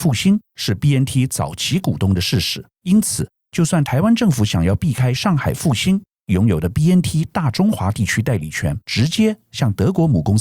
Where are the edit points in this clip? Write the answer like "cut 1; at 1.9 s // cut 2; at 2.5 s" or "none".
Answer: cut 1; at 2.7 s // cut 2; at 8.8 s